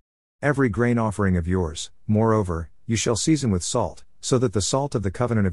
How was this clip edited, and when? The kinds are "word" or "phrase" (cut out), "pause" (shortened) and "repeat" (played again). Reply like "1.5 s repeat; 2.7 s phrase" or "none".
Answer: none